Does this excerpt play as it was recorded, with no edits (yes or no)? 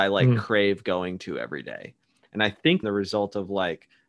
no